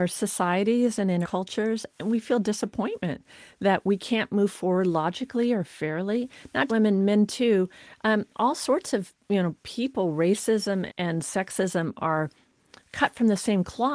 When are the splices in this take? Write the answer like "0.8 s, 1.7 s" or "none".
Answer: 1.2 s, 6.7 s, 10.9 s